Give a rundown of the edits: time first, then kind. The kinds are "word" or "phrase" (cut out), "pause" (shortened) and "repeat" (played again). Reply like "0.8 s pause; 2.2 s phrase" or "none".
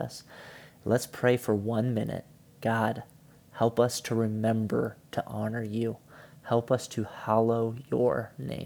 none